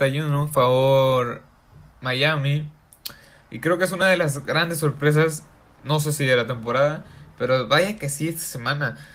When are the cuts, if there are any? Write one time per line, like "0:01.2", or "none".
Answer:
none